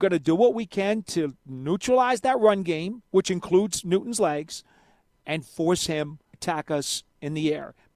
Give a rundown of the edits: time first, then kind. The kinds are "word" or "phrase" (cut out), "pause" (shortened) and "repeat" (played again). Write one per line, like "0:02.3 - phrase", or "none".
0:06.3 - word